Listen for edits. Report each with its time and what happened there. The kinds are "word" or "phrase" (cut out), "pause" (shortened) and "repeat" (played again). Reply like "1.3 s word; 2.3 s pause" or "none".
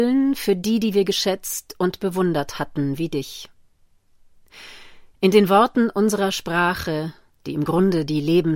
none